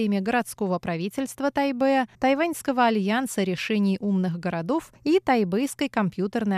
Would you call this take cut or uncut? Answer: cut